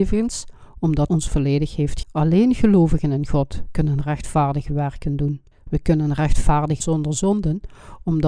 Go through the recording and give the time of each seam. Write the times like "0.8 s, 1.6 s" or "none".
1.1 s, 2.0 s, 5.5 s, 6.8 s